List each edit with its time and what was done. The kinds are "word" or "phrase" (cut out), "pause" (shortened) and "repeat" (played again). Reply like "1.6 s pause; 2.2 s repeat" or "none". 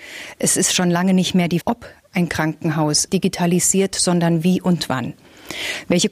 1.6 s word; 3.1 s word